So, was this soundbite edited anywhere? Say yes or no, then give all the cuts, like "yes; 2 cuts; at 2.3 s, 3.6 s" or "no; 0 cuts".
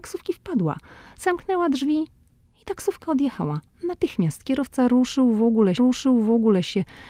yes; 1 cut; at 5.8 s